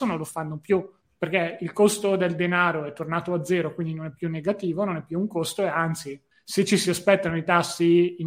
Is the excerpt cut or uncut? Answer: uncut